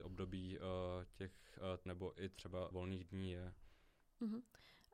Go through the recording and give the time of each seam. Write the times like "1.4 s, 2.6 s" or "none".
1.9 s, 2.7 s